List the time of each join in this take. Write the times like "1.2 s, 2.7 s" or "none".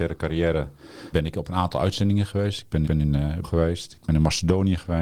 1.1 s, 2.8 s, 3.4 s